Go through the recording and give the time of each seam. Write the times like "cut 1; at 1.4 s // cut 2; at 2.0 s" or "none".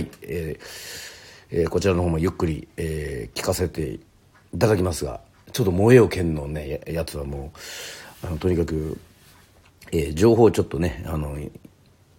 none